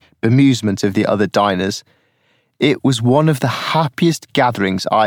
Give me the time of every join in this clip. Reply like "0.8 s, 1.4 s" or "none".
none